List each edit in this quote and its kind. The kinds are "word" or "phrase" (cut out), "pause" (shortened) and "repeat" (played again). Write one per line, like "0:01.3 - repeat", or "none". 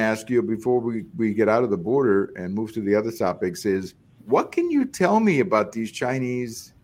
0:04.2 - pause